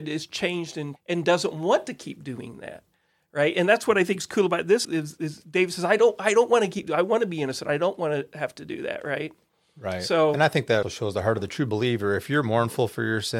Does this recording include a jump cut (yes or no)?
yes